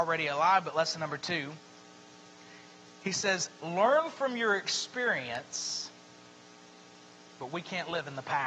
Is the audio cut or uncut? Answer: uncut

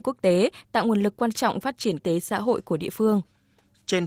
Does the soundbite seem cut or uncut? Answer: cut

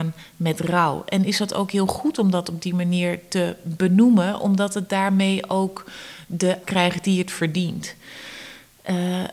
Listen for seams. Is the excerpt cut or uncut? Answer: cut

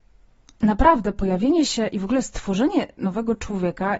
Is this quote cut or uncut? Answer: uncut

